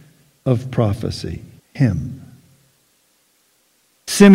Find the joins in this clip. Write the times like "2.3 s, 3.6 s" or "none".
1.6 s